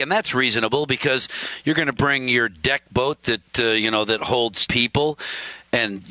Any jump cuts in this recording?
yes; 1 cut; at 4.7 s

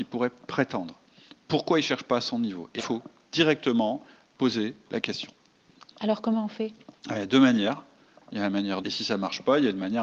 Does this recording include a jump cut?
yes; 2 cuts; at 2.8 s, 8.8 s

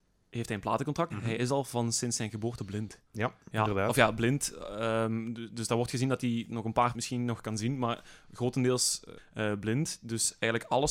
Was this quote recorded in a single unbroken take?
no; 4 cuts; at 1.1 s, 3.1 s, 6.9 s, 9.2 s

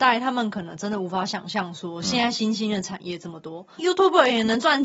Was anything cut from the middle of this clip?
yes; 1 cut; at 3.8 s

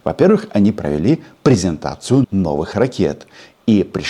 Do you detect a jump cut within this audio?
yes; 1 cut; at 2.2 s

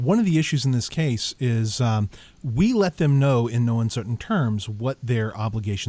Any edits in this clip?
no; 0 cuts

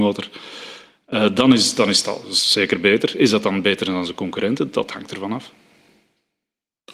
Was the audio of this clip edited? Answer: no; 0 cuts

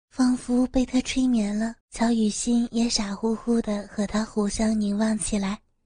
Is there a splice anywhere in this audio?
yes; 1 cut; at 1.8 s

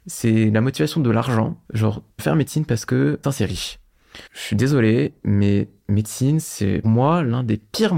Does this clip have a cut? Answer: yes; 5 cuts; at 1.6 s, 2.2 s, 3.2 s, 4.3 s, 6.8 s

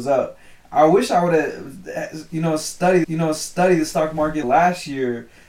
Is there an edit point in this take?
yes; 2 cuts; at 3.0 s, 4.4 s

